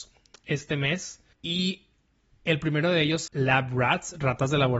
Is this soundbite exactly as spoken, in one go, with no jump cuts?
no; 2 cuts; at 1.3 s, 3.3 s

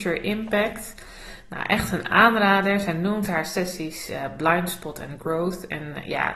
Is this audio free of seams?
yes; 0 cuts

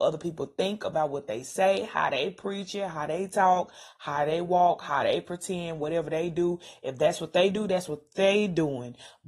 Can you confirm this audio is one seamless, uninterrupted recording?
yes; 0 cuts

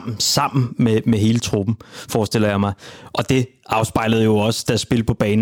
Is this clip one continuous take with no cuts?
yes; 0 cuts

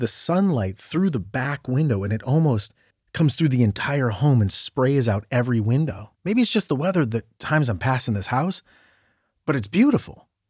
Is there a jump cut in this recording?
yes; 2 cuts; at 2.9 s, 6.1 s

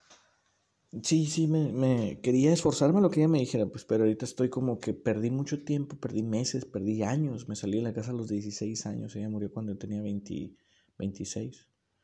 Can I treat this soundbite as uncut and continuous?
yes; 0 cuts

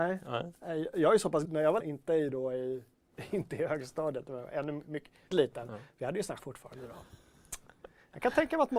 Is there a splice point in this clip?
yes; 4 cuts; at 1.5 s, 1.8 s, 5.3 s, 6.4 s

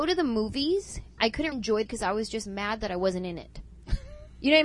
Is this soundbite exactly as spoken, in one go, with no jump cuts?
no; 3 cuts; at 1.2 s, 1.5 s, 1.9 s

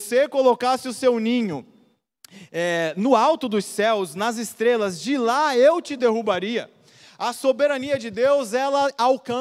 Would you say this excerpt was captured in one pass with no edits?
yes; 0 cuts

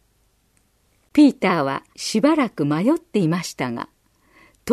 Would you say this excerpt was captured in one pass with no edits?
no; 1 cut; at 1.9 s

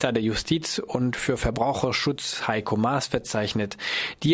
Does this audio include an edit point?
no; 0 cuts

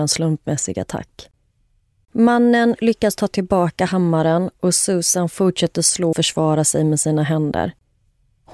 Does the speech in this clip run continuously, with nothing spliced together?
no; 2 cuts; at 1.5 s, 6.1 s

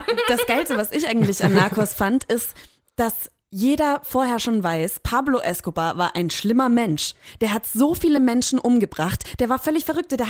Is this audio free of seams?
yes; 0 cuts

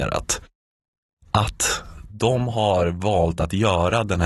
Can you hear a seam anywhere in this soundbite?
no; 0 cuts

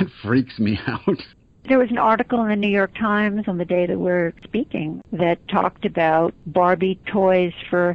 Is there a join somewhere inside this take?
no; 0 cuts

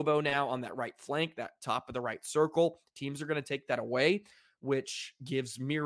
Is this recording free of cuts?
yes; 0 cuts

